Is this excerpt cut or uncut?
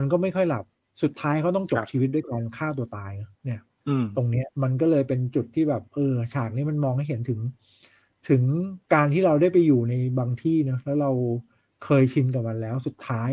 cut